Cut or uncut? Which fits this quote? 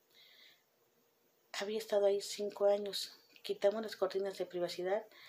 uncut